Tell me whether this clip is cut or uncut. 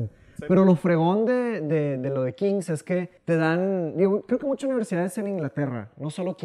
cut